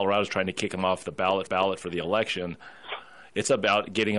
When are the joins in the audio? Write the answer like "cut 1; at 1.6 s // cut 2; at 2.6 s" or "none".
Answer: cut 1; at 1.5 s